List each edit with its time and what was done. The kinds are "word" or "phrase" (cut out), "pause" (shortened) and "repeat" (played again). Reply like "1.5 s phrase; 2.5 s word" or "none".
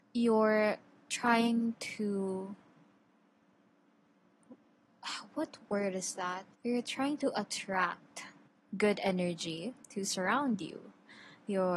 6.5 s pause; 8.5 s pause; 9.8 s pause